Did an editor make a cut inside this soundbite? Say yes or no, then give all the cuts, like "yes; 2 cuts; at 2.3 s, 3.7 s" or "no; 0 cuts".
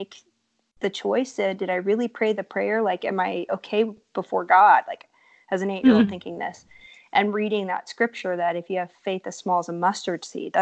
no; 0 cuts